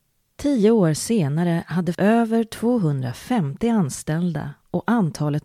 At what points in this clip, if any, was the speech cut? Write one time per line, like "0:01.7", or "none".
0:01.9